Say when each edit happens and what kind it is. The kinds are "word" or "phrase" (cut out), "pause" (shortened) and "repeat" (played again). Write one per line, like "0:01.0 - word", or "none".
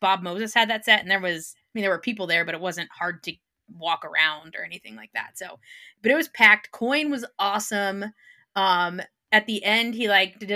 none

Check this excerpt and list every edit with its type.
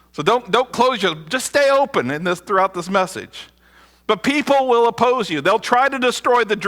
none

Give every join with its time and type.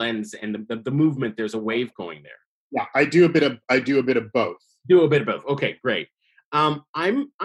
none

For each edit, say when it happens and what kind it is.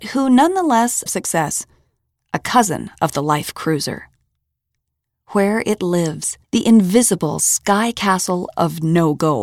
0:01.1 - phrase
0:06.4 - pause

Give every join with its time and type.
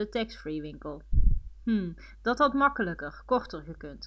none

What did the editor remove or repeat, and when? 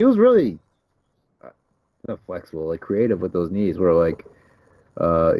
none

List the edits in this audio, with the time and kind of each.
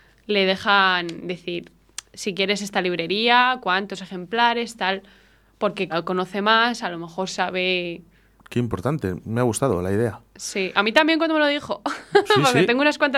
0:05.9 - word

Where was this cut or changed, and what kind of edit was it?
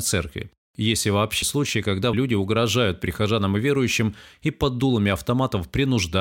0:01.4 - word
0:02.1 - word

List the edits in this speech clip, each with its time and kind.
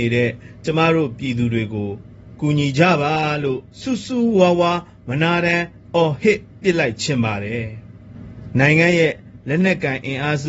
0:03.7 - pause

